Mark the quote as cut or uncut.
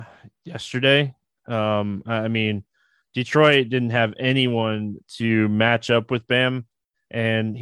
uncut